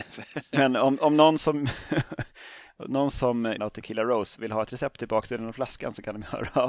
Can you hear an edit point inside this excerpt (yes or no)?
yes